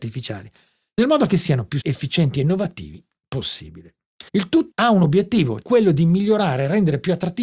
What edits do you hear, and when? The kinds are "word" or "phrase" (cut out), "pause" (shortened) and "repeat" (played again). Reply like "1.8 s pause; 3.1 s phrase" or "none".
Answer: 1.8 s word; 4.3 s pause; 4.7 s word; 5.6 s word